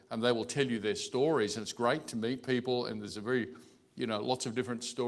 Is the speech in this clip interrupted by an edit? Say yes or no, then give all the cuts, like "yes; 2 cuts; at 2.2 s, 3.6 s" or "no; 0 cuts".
no; 0 cuts